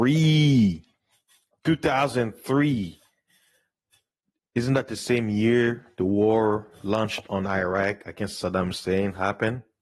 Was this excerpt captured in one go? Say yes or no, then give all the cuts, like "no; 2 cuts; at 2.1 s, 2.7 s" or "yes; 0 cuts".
yes; 0 cuts